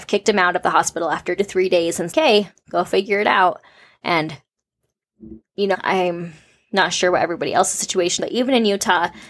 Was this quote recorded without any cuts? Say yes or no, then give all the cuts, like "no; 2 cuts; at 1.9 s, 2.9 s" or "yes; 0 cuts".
no; 4 cuts; at 1.4 s, 2.1 s, 5.7 s, 8.2 s